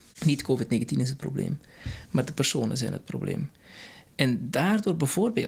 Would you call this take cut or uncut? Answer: uncut